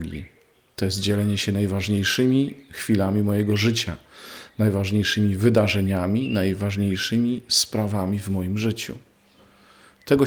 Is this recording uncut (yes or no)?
yes